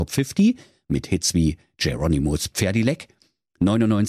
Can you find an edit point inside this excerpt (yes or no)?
no